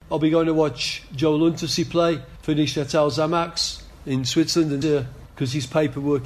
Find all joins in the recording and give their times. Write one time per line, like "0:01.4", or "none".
0:04.8